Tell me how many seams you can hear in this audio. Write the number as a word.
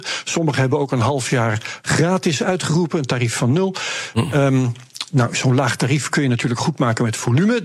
zero